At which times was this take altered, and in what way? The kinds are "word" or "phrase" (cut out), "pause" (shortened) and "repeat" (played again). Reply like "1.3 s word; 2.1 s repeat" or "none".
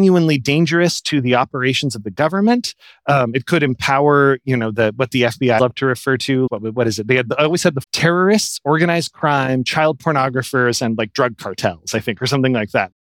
5.6 s word; 6.5 s word; 7.8 s word